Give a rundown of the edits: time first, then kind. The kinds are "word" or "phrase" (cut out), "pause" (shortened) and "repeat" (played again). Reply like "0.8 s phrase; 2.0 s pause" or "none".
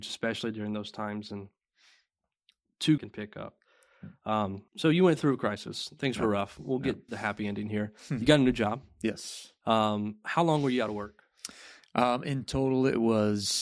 3.0 s phrase; 4.7 s pause; 7.1 s phrase